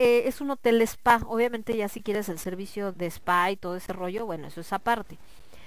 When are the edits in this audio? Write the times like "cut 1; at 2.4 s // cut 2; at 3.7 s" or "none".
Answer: cut 1; at 2.9 s